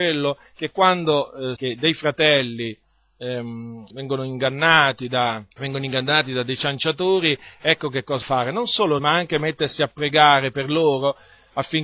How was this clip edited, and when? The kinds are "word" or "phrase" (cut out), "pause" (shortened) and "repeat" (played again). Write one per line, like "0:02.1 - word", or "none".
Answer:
0:01.6 - word
0:03.9 - word
0:05.5 - pause
0:08.2 - word
0:09.0 - word